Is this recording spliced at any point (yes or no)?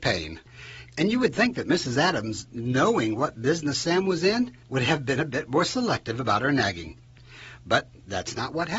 yes